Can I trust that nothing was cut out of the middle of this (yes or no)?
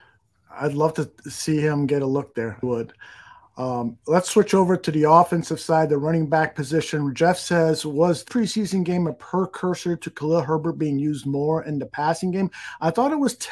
no